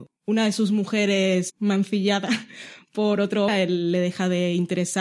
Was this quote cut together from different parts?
yes; 2 cuts; at 1.5 s, 3.5 s

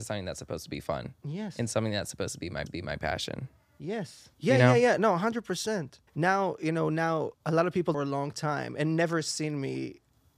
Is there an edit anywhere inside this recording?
yes; 5 cuts; at 2.7 s, 4.3 s, 6.1 s, 7.3 s, 7.9 s

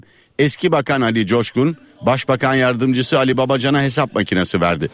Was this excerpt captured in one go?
yes; 0 cuts

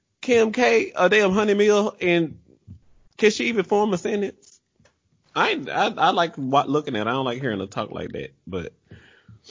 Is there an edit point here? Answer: no; 0 cuts

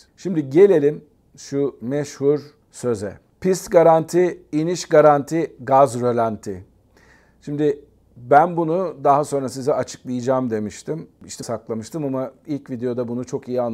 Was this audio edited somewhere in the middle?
yes; 1 cut; at 11.4 s

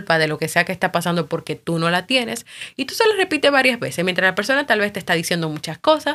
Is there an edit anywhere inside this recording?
no; 0 cuts

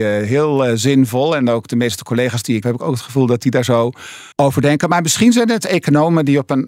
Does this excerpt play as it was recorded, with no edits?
no; 2 cuts; at 2.6 s, 4.3 s

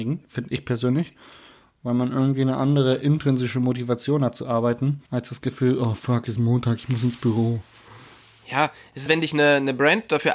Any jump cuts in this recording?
yes; 2 cuts; at 5.1 s, 9.1 s

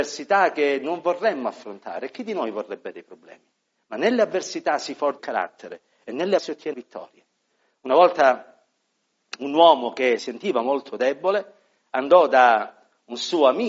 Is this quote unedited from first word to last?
no; 4 cuts; at 5.2 s, 6.4 s, 6.7 s, 10.2 s

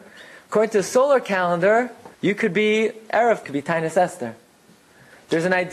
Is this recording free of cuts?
no; 2 cuts; at 2.1 s, 3.4 s

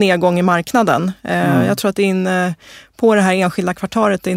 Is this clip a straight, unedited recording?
yes; 0 cuts

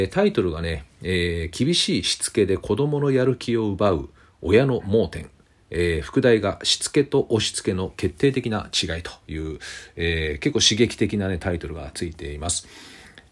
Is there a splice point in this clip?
no; 0 cuts

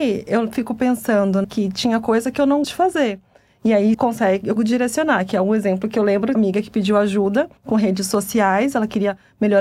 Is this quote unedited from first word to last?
no; 6 cuts; at 1.4 s, 2.6 s, 3.9 s, 4.6 s, 6.3 s, 7.6 s

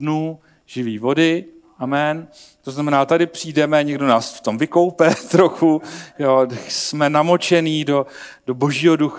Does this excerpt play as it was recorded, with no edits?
yes; 0 cuts

